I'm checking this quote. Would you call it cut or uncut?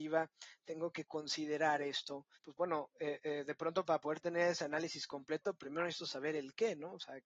cut